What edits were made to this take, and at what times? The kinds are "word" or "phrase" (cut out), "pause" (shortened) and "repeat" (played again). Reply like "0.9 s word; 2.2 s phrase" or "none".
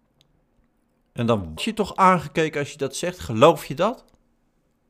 1.6 s word